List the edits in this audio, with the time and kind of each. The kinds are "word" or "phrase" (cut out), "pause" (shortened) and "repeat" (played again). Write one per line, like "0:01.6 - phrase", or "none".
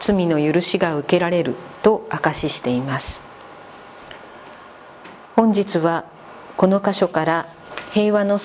0:05.2 - pause